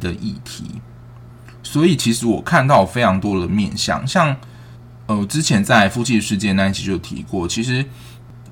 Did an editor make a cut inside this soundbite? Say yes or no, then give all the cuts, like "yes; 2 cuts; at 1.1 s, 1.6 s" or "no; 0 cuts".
no; 0 cuts